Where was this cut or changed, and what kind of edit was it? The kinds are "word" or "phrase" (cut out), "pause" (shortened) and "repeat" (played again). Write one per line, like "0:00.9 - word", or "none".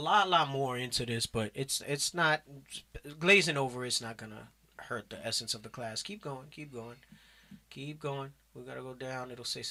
none